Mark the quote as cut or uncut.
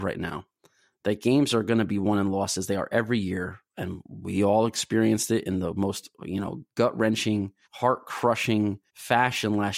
cut